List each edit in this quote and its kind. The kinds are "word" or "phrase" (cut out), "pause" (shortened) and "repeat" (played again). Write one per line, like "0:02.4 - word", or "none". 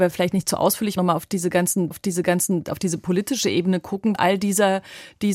0:01.0 - word
0:01.9 - repeat
0:04.1 - phrase